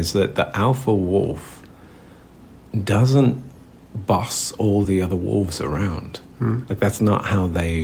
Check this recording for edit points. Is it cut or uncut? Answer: uncut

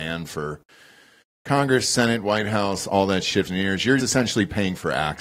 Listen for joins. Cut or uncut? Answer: cut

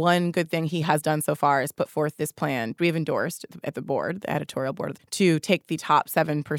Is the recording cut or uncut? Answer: cut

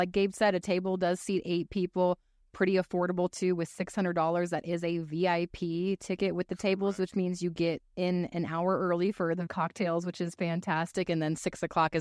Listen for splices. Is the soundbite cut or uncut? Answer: uncut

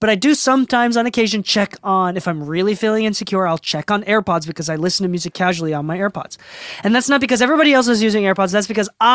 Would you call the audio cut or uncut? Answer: uncut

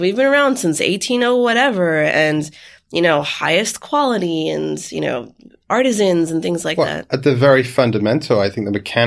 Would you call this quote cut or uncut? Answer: uncut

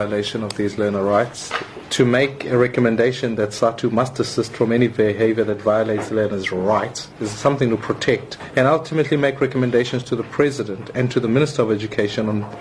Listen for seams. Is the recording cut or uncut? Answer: cut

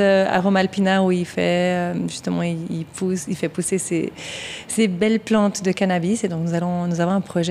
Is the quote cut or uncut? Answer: uncut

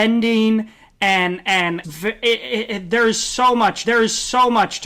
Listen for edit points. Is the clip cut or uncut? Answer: cut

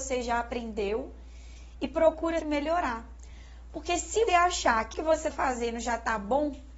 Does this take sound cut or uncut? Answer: cut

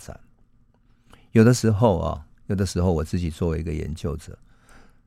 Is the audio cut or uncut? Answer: uncut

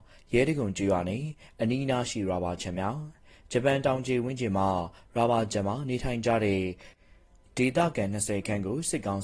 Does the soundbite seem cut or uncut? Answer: uncut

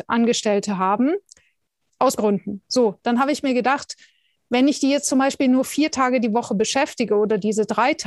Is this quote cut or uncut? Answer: cut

